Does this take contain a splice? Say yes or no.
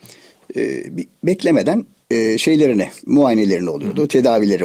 yes